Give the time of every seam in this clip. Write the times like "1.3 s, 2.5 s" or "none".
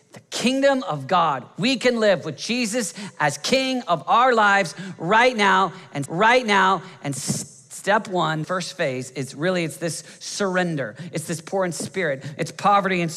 6.1 s, 8.4 s